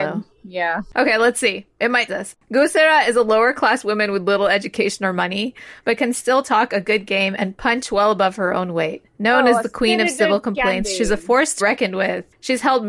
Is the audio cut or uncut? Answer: cut